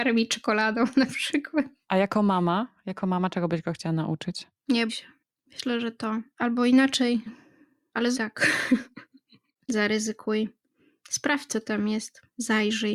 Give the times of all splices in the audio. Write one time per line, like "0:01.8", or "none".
0:04.9
0:06.3
0:07.3
0:08.1
0:09.6